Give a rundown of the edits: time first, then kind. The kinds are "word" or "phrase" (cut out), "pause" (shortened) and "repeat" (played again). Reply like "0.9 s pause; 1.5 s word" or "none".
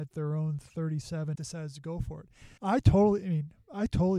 1.3 s phrase; 2.6 s pause